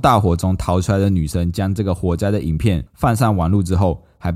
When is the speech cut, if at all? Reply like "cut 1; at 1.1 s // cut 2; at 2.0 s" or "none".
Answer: cut 1; at 2.9 s